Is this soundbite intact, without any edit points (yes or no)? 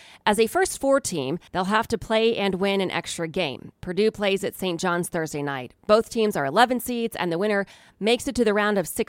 no